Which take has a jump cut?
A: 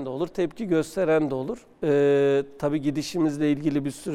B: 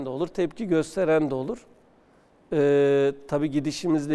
A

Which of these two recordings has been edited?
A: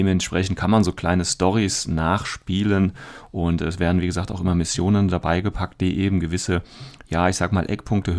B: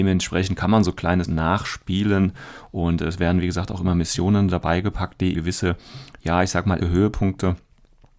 B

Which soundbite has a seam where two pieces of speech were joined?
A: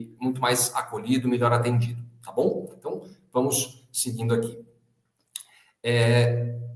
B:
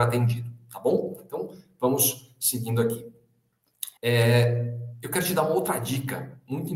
B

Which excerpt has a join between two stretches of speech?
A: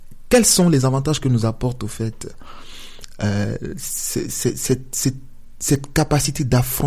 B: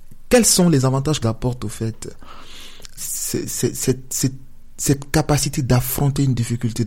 B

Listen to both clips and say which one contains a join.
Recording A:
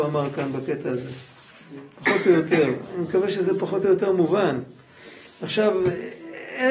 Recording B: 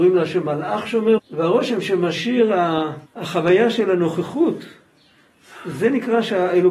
B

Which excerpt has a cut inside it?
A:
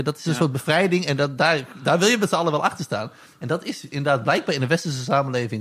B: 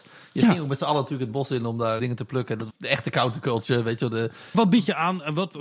B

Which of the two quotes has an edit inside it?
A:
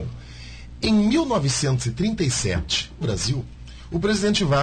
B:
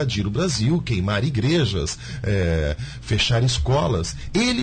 A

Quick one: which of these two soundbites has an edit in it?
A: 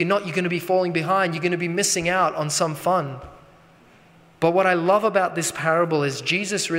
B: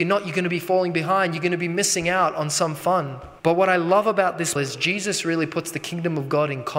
B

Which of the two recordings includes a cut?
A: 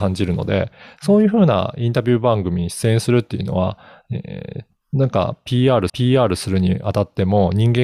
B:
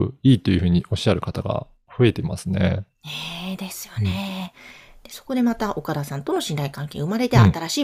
A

